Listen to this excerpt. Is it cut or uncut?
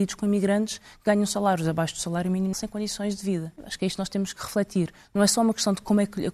cut